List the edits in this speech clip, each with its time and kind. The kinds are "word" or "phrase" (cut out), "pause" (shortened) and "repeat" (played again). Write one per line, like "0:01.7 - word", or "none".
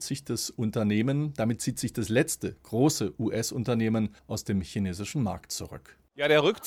0:04.2 - pause